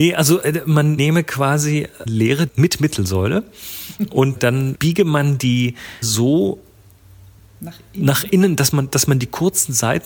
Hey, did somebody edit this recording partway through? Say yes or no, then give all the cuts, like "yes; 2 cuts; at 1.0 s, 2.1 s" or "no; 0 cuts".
yes; 6 cuts; at 1.0 s, 2.1 s, 2.5 s, 4.4 s, 4.7 s, 6.0 s